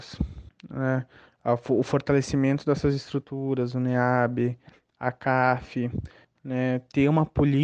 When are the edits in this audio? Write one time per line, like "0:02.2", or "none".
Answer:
none